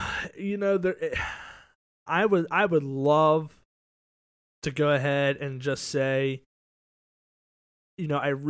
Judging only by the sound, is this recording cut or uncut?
uncut